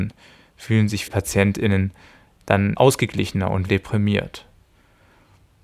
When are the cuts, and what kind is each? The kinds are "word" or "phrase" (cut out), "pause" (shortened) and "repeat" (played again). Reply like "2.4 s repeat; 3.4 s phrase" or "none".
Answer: 1.1 s word; 2.8 s word; 3.7 s word